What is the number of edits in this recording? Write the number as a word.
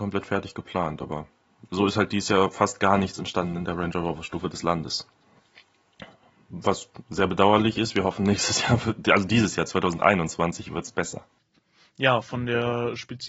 zero